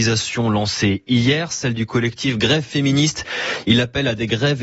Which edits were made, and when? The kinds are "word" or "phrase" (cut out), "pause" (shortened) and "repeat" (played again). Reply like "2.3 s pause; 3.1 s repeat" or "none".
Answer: none

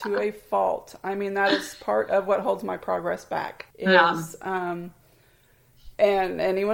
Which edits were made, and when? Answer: 3.7 s pause

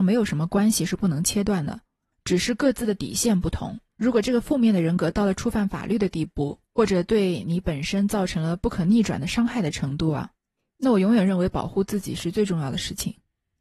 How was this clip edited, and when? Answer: 3.9 s pause

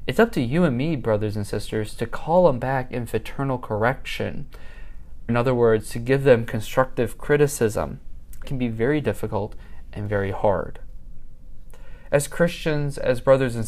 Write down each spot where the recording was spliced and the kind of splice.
5.3 s word; 8.4 s phrase

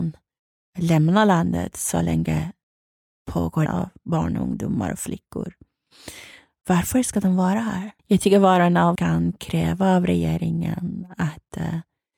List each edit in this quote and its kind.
3.7 s phrase; 8.0 s pause; 9.0 s word

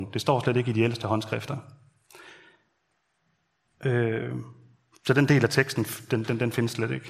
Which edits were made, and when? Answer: none

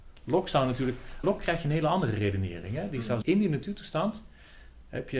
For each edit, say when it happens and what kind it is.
1.2 s word; 3.2 s word

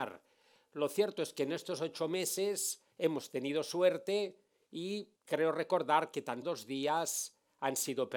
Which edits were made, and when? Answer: 2.9 s pause; 5.2 s pause; 6.4 s word

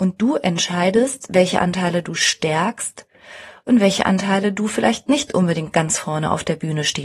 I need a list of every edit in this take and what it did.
none

